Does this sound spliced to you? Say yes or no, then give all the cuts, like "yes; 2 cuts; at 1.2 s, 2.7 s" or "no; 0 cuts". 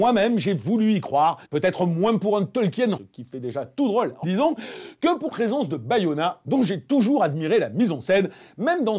yes; 4 cuts; at 1.4 s, 3.0 s, 4.2 s, 5.3 s